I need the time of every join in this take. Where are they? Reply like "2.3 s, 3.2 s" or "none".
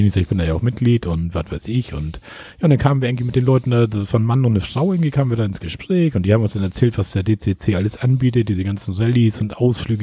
none